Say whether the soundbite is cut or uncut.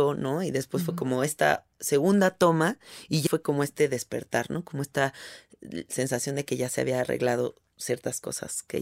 cut